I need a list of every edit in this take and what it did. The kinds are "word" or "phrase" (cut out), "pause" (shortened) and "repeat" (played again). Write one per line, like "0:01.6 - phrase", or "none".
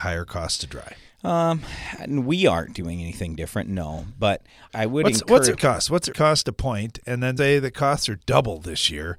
0:04.7 - word
0:05.5 - word
0:06.1 - word
0:07.4 - word